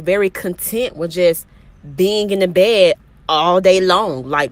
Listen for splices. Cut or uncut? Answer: uncut